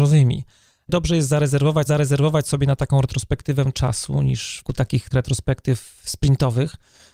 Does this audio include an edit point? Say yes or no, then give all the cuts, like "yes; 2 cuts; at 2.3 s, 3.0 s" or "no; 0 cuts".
yes; 4 cuts; at 1.9 s, 3.7 s, 4.6 s, 5.1 s